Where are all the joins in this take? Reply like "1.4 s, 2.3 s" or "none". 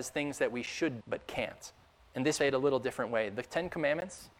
1.0 s, 1.9 s, 2.4 s